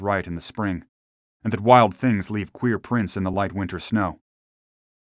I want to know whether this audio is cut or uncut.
uncut